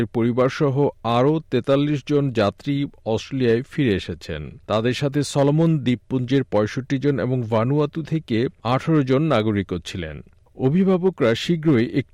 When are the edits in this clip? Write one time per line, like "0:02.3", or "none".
0:04.6

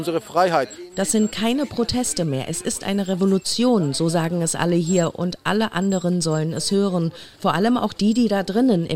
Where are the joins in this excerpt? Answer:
none

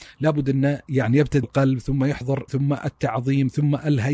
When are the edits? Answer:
0:01.4
0:02.5

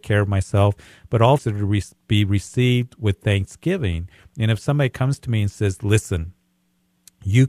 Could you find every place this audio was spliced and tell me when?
0:01.4

